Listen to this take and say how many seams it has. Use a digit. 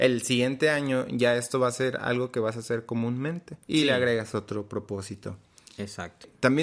1